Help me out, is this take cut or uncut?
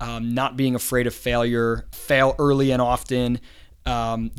cut